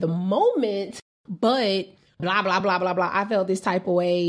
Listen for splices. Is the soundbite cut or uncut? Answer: uncut